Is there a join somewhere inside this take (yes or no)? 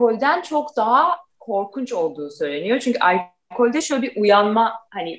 no